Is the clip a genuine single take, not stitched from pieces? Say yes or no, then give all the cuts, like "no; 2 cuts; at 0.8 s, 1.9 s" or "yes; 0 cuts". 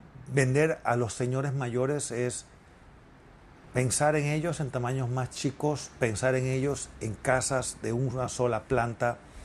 yes; 0 cuts